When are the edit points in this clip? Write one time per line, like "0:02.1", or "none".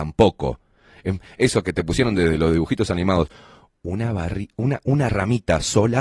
none